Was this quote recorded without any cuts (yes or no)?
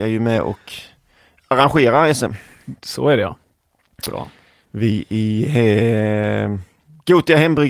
yes